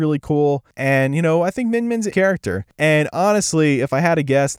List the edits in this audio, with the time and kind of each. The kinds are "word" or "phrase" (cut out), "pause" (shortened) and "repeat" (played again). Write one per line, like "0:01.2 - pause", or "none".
0:02.1 - word